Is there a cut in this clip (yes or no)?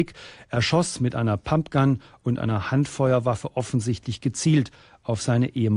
no